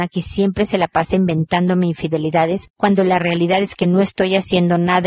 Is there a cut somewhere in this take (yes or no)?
no